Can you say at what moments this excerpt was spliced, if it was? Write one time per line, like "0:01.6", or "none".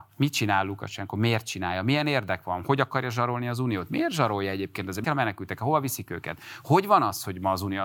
0:05.0